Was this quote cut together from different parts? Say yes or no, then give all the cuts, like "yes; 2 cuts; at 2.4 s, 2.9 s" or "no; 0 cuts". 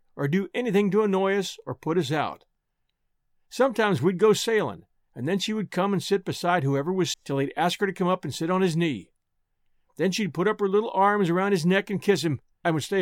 yes; 1 cut; at 7.1 s